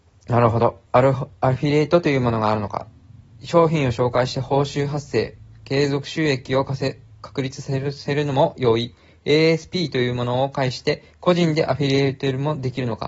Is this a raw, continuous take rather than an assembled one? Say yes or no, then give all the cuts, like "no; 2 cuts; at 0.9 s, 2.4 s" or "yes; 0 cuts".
yes; 0 cuts